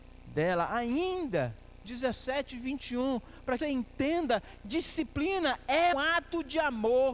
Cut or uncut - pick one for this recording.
cut